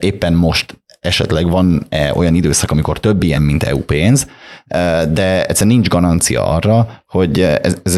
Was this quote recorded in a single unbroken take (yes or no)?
no